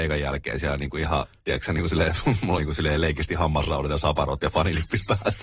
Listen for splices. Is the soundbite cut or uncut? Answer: cut